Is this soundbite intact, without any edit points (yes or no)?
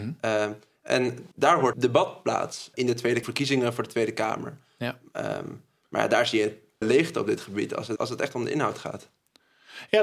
no